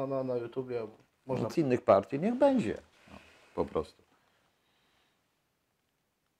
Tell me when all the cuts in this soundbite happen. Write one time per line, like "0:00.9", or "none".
0:01.5